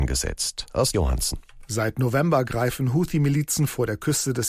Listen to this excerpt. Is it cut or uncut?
cut